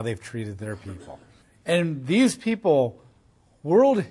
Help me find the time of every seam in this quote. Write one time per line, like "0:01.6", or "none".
0:01.4